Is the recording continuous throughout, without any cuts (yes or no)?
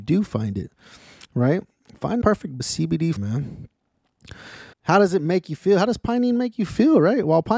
no